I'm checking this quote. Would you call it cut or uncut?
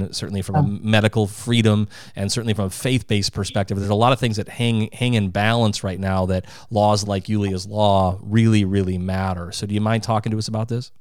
uncut